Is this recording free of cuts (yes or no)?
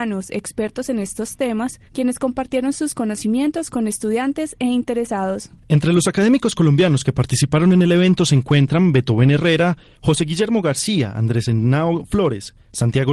no